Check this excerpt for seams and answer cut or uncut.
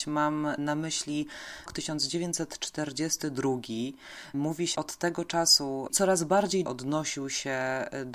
cut